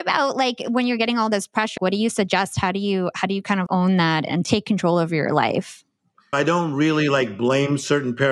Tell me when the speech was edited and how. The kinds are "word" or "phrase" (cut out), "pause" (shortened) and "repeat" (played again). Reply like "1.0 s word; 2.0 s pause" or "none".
1.8 s word; 3.7 s word; 6.3 s word